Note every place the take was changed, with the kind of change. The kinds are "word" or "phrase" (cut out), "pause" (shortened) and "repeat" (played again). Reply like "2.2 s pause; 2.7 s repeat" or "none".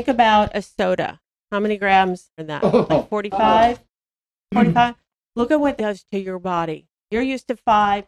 2.4 s word; 5.8 s word; 7.0 s pause